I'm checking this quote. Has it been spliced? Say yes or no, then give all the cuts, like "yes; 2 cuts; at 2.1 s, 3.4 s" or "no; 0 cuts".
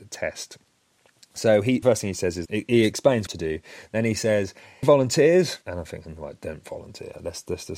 yes; 5 cuts; at 1.8 s, 2.5 s, 3.3 s, 4.8 s, 5.6 s